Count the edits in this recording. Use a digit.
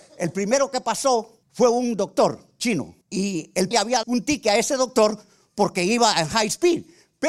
4